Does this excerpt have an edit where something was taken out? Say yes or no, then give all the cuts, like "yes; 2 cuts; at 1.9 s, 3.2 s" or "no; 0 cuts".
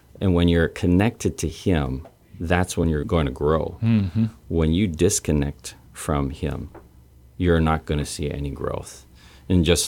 no; 0 cuts